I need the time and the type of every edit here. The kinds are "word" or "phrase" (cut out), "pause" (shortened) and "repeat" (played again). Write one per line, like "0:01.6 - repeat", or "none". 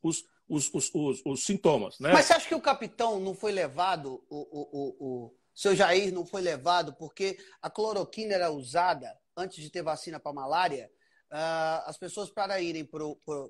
none

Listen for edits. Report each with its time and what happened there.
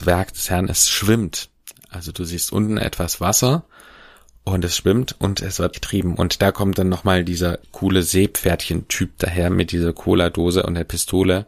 0:05.7 - word
0:07.6 - word

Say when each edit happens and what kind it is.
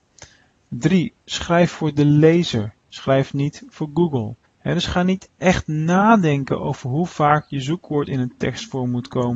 0:04.4 - pause

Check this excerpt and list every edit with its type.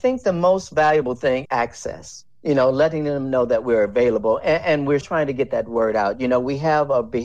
0:01.4 - word
0:05.0 - word

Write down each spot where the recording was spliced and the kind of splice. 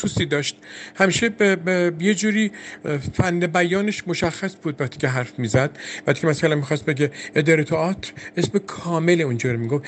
none

